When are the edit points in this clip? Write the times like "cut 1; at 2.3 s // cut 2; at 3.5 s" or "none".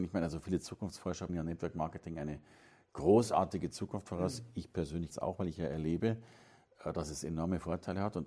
cut 1; at 1.3 s // cut 2; at 5.1 s

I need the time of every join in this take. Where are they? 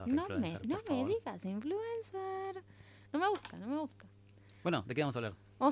cut 1; at 4.6 s

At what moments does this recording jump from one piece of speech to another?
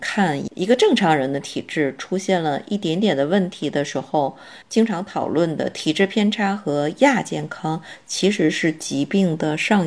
cut 1; at 4.6 s

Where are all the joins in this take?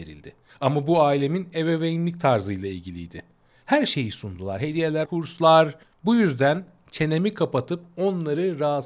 cut 1; at 5.1 s

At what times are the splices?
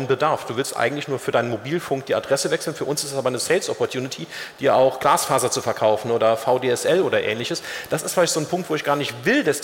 none

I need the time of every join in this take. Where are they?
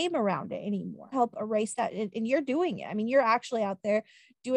cut 1; at 1.1 s

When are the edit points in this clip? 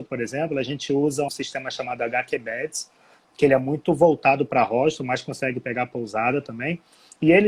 cut 1; at 1.3 s

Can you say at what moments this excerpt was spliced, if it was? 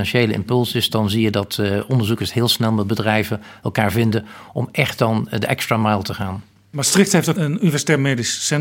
cut 1; at 7.4 s

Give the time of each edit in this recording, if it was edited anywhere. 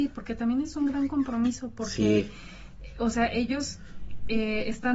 none

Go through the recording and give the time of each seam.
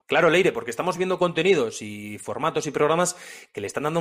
none

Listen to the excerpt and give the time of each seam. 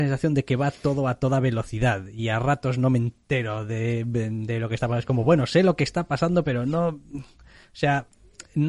none

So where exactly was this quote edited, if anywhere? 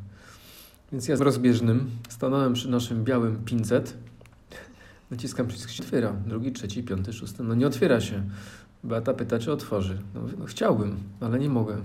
cut 1; at 1.2 s // cut 2; at 5.8 s

